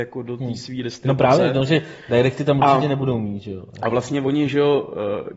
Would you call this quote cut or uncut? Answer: uncut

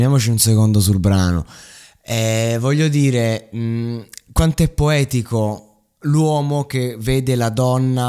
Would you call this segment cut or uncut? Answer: uncut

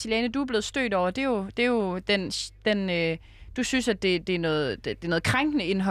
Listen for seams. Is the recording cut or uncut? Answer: uncut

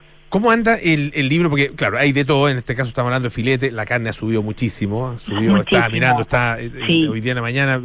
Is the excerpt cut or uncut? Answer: uncut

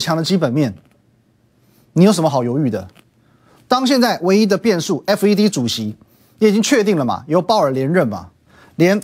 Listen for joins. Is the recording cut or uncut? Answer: uncut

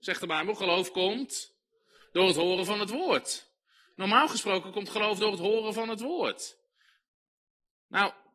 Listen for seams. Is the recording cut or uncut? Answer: uncut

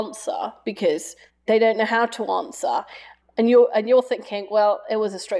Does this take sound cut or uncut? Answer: cut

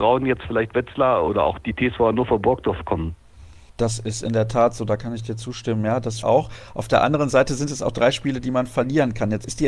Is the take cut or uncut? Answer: cut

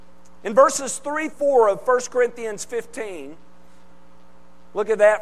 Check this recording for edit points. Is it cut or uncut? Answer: cut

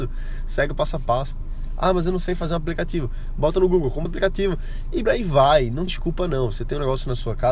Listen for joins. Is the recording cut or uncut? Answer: cut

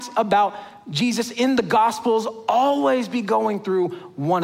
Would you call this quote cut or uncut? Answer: uncut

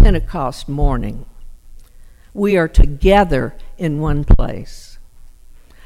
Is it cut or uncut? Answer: uncut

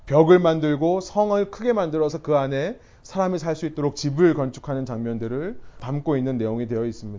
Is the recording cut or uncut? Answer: uncut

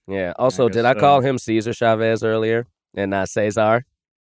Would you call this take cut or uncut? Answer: uncut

